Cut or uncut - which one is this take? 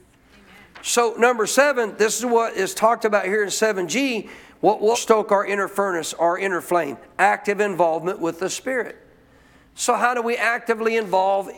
cut